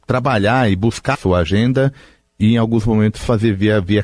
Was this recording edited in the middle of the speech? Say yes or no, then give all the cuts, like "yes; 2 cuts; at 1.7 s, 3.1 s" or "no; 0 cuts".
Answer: yes; 1 cut; at 1.1 s